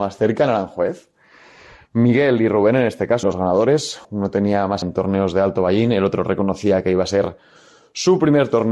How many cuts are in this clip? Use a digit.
3